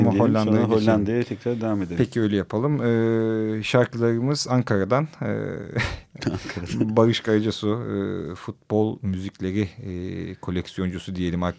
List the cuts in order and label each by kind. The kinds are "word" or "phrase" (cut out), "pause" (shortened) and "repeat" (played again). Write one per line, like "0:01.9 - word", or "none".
none